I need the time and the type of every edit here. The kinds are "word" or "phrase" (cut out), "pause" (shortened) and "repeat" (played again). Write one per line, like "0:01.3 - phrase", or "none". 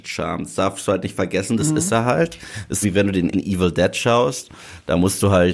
0:02.8 - phrase
0:03.3 - word